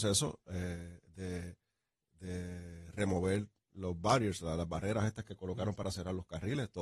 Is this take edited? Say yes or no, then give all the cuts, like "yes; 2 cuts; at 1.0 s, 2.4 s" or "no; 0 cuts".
no; 0 cuts